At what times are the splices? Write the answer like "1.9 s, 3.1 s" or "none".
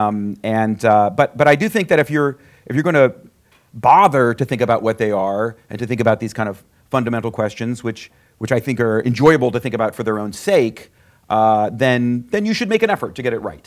none